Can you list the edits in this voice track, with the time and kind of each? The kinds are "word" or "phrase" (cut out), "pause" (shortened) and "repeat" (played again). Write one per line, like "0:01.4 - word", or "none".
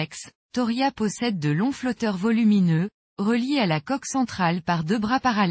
none